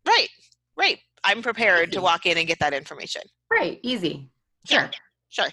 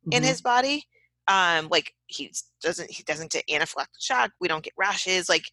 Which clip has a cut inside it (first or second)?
second